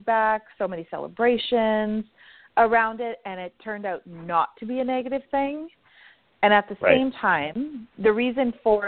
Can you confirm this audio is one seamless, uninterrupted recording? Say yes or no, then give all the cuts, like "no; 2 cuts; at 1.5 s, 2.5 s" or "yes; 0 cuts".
yes; 0 cuts